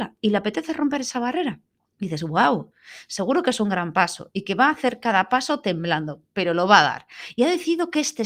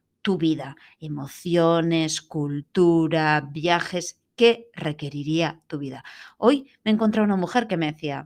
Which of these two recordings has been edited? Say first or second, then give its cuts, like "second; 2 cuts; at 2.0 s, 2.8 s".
first; 1 cut; at 1.7 s